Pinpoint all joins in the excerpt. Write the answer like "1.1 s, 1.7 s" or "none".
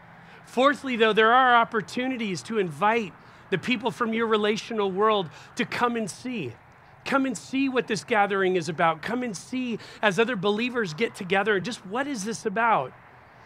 none